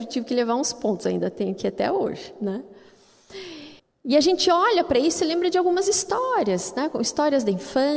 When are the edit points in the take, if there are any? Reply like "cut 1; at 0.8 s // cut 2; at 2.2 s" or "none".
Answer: cut 1; at 3.8 s